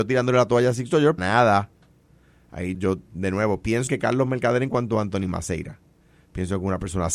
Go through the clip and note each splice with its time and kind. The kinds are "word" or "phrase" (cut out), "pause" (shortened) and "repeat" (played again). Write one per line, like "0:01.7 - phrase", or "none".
0:01.2 - word
0:02.7 - word
0:03.9 - word